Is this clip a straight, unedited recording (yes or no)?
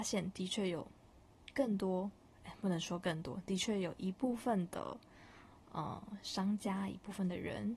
yes